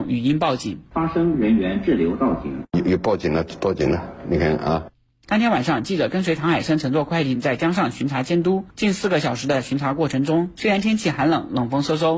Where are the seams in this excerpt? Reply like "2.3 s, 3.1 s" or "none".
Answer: 8.7 s